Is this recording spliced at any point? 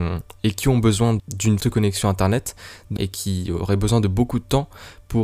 yes; 3 cuts; at 1.2 s, 1.6 s, 3.0 s

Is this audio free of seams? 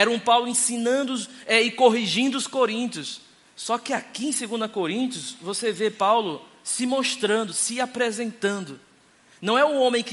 yes; 0 cuts

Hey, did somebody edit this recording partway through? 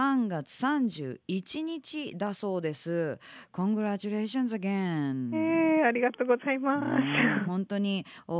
no; 0 cuts

